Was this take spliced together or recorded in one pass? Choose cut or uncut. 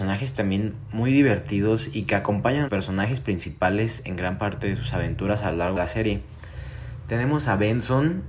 cut